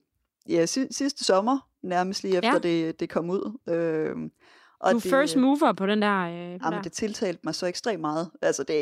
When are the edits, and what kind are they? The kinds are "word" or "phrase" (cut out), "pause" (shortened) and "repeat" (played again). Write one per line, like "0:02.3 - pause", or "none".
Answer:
0:06.6 - phrase